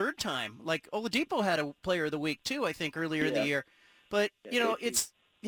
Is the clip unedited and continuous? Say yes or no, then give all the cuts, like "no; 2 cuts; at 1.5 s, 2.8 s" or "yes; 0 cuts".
yes; 0 cuts